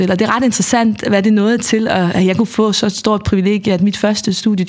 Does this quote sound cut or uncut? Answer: uncut